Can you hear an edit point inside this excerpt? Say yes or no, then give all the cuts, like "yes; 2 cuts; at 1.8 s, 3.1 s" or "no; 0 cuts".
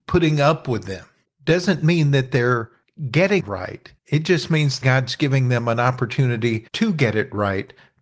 yes; 5 cuts; at 1.2 s, 3.4 s, 4.0 s, 4.8 s, 6.7 s